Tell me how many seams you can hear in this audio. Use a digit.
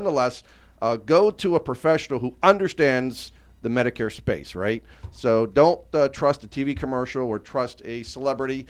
0